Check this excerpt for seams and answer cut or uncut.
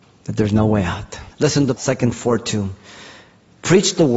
cut